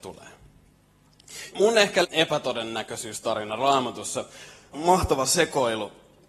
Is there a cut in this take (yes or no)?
yes